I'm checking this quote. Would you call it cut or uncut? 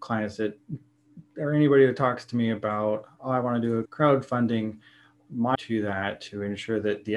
cut